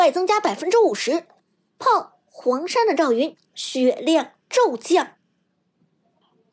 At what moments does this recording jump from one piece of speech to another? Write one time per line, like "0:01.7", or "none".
none